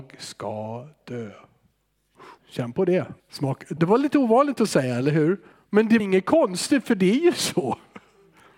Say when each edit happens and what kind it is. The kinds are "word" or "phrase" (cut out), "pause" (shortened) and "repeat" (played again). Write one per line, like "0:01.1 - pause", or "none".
0:02.4 - pause
0:03.2 - pause
0:03.8 - word
0:05.5 - pause
0:06.0 - word